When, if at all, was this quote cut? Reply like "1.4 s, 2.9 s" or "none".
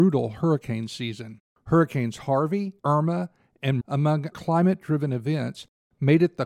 1.5 s, 2.8 s, 3.8 s, 4.3 s